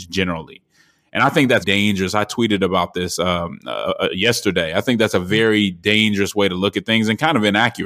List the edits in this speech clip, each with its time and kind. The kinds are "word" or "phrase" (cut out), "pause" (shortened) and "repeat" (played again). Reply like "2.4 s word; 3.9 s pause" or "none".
1.6 s word